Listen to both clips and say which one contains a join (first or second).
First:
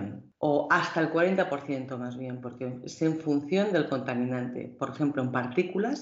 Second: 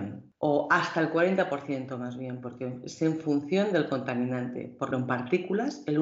second